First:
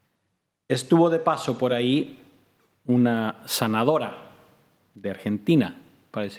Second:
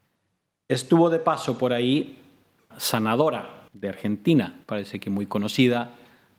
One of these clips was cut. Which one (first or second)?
second